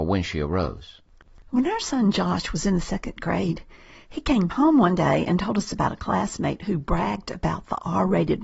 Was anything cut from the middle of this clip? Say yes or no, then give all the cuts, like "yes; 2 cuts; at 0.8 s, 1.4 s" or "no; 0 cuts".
no; 0 cuts